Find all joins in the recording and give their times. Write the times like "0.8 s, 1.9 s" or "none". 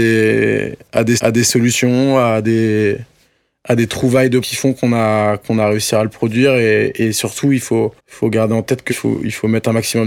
1.2 s, 4.4 s, 8.0 s, 8.9 s